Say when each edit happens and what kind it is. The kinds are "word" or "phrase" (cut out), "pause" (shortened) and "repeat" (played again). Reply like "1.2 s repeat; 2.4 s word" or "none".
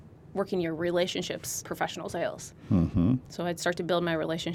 1.6 s word